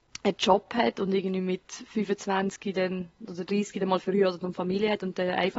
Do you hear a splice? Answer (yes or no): no